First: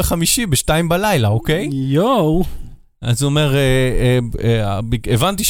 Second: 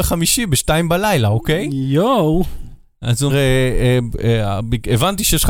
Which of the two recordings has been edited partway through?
second; 1 cut; at 3.3 s

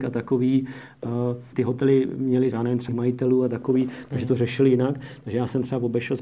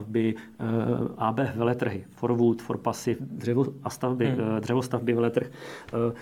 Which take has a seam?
first; 3 cuts; at 1.5 s, 2.5 s, 2.9 s

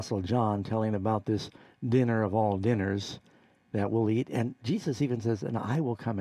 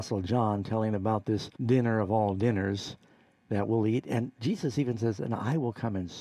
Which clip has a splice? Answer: second; 1 cut; at 1.5 s

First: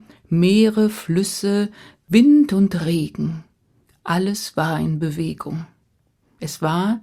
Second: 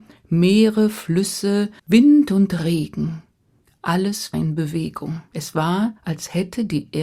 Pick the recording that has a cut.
second; 4 cuts; at 1.8 s, 4.3 s, 5.3 s, 6.0 s

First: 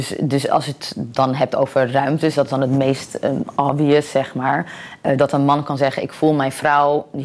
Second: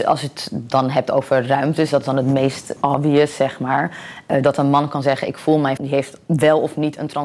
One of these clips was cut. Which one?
second; 3 cuts; at 2.8 s, 5.8 s, 6.2 s

